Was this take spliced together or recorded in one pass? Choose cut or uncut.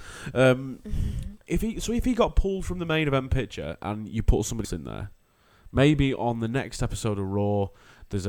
cut